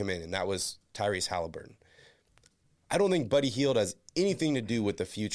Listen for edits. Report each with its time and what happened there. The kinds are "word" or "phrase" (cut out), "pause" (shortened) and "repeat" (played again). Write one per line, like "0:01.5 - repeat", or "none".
none